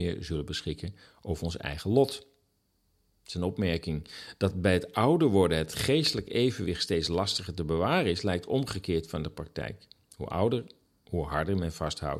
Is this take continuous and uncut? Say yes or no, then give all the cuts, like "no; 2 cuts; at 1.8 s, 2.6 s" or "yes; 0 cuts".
yes; 0 cuts